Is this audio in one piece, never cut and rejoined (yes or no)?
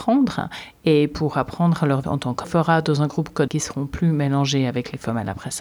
no